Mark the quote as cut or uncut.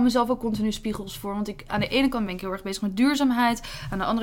uncut